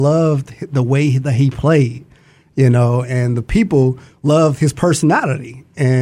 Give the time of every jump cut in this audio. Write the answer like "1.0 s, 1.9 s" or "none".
none